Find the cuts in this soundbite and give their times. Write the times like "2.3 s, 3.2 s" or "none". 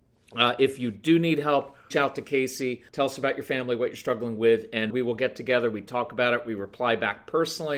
1.9 s, 2.9 s, 4.9 s